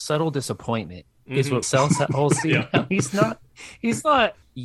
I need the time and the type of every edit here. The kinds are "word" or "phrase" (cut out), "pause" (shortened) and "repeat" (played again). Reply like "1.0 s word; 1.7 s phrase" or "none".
1.6 s word